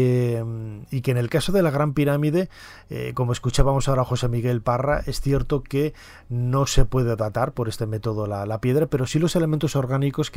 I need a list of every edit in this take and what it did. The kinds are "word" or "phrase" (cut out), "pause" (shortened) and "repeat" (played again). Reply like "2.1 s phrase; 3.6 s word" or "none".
none